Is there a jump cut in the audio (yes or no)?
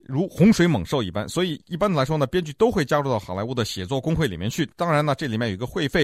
no